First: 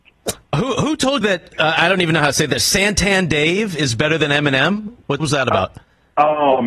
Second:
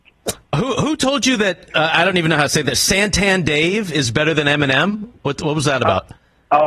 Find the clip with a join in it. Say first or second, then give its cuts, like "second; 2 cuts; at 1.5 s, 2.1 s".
first; 2 cuts; at 1.2 s, 5.2 s